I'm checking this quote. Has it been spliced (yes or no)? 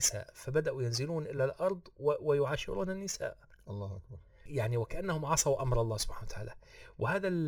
no